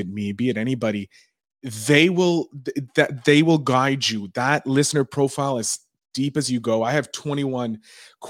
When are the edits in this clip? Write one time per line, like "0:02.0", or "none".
none